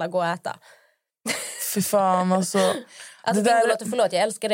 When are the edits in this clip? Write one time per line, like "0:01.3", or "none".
none